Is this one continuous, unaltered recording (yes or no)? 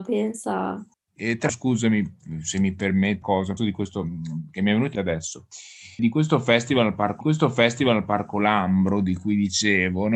no